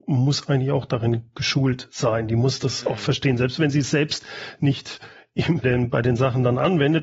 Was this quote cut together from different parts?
yes; 1 cut; at 5.6 s

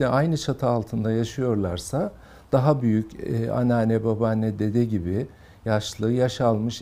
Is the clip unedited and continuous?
yes; 0 cuts

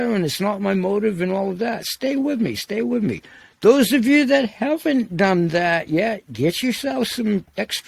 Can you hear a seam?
no; 0 cuts

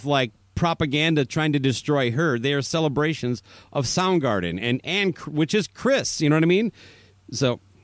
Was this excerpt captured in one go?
yes; 0 cuts

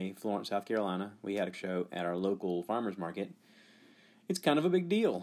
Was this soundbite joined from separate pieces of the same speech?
yes; 1 cut; at 1.5 s

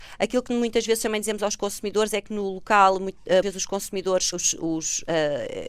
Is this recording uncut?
no; 2 cuts; at 3.4 s, 4.3 s

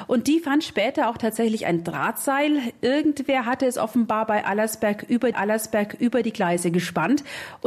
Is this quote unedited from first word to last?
no; 1 cut; at 5.3 s

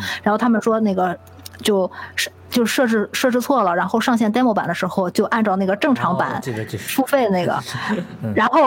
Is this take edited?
no; 0 cuts

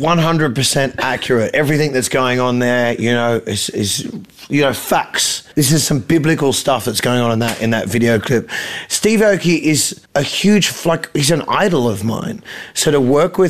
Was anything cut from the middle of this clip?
yes; 2 cuts; at 5.5 s, 10.0 s

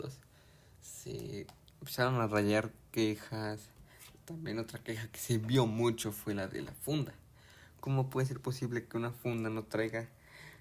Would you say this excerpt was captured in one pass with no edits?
yes; 0 cuts

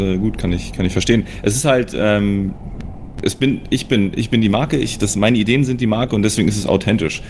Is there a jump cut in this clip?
no; 0 cuts

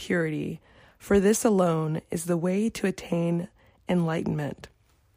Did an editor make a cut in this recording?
no; 0 cuts

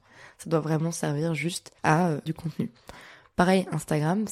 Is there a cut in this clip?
yes; 2 cuts; at 1.8 s, 2.3 s

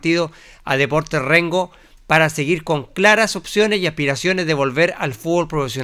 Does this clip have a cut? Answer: no; 0 cuts

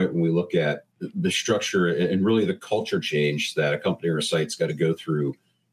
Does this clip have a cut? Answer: yes; 1 cut; at 0.9 s

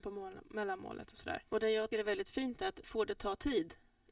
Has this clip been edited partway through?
yes; 3 cuts; at 1.5 s, 1.9 s, 2.8 s

